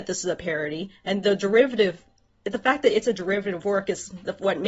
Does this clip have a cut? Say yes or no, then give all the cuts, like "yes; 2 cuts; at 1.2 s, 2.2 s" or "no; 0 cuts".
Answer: no; 0 cuts